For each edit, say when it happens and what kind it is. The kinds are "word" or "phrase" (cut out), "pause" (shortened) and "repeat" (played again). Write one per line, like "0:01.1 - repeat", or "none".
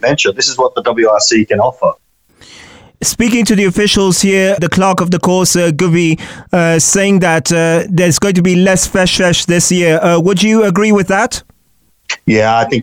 0:04.6 - word